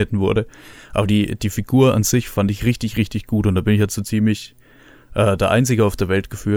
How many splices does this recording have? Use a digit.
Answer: 0